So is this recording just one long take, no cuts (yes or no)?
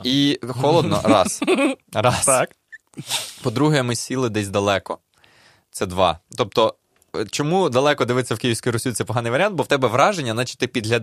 yes